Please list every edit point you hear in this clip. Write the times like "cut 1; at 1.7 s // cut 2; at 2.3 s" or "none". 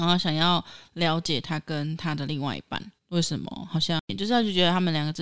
cut 1; at 3.0 s